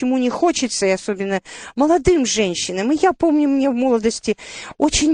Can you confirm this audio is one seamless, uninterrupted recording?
yes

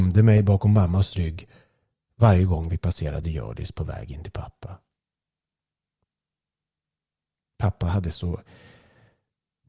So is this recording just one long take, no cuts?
yes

